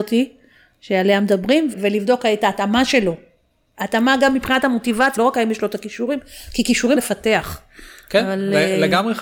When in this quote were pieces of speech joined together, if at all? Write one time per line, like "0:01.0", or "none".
0:01.7
0:05.2
0:07.0